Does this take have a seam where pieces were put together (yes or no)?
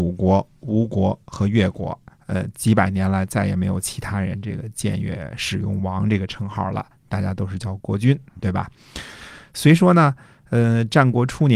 no